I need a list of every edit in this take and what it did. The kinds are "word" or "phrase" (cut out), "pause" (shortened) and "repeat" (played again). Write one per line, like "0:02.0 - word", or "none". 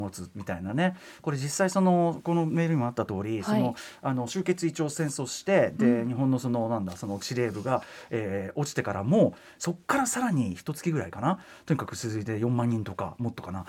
none